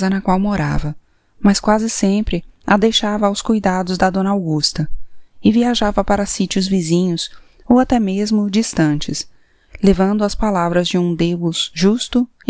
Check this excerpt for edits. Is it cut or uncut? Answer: uncut